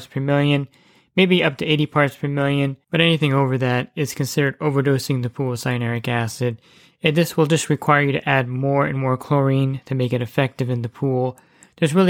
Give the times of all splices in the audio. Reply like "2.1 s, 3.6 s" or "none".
2.8 s